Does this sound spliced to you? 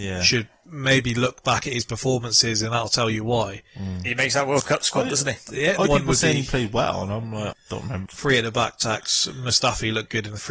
yes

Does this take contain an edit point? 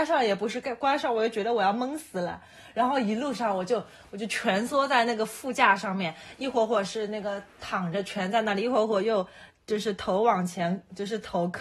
no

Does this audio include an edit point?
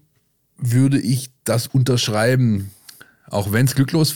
no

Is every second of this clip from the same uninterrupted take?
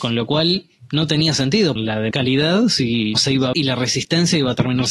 no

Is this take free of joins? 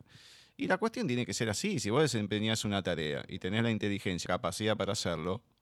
no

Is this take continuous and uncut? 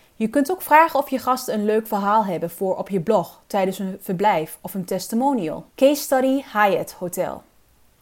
no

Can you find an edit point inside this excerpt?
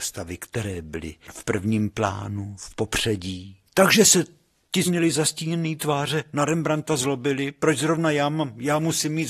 yes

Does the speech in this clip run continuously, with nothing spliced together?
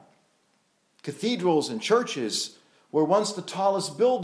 yes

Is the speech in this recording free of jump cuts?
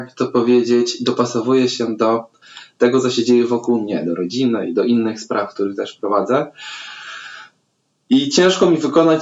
yes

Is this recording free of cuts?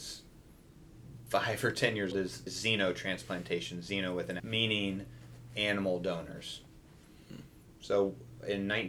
no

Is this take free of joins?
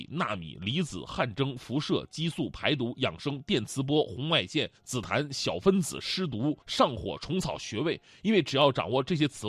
no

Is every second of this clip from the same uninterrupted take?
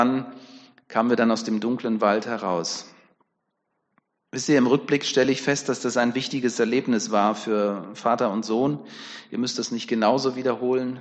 yes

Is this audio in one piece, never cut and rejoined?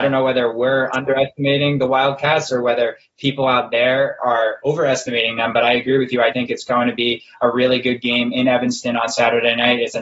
no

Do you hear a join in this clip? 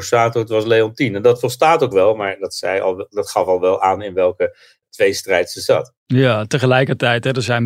no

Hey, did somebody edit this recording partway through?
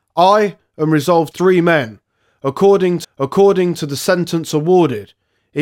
yes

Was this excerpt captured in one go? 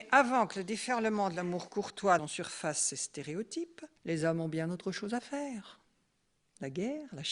no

